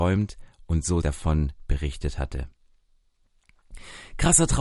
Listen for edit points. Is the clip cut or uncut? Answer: cut